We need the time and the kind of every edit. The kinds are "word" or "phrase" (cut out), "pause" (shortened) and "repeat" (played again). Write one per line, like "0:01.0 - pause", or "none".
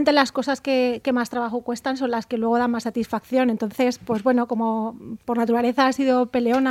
none